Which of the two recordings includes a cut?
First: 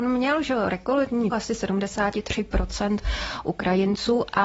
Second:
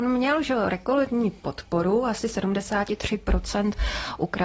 first; 1 cut; at 1.3 s

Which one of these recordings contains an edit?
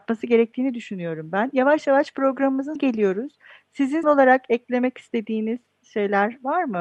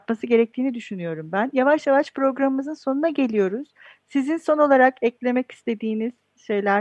first; 2 cuts; at 2.8 s, 4.0 s

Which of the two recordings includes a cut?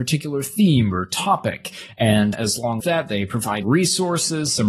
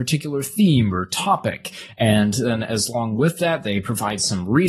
first; 3 cuts; at 2.3 s, 2.8 s, 3.6 s

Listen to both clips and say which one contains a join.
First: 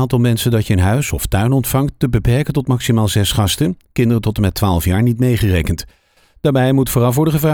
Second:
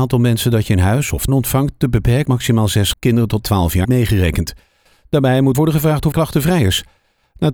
second; 7 cuts; at 1.3 s, 2.3 s, 2.9 s, 3.4 s, 3.8 s, 5.5 s, 6.1 s

